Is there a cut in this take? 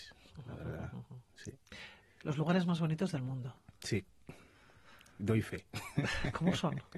no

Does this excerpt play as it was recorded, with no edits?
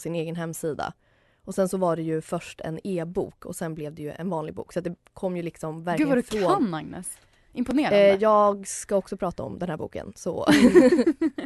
yes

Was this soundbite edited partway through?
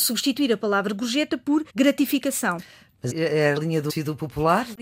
yes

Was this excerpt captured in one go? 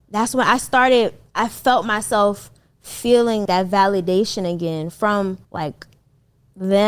no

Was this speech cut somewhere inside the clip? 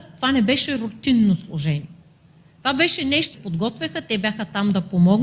yes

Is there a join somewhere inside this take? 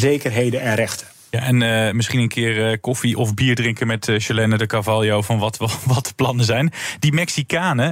no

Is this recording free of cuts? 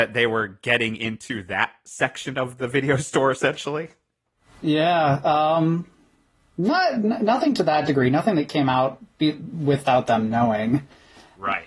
yes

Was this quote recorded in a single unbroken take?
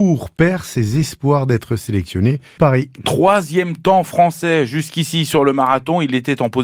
no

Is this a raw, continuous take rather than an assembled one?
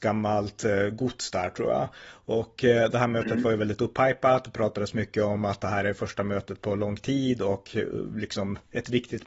yes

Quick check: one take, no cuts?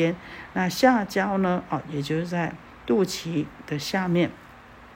yes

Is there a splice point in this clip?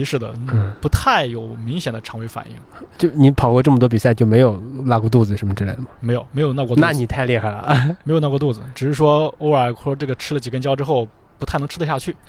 no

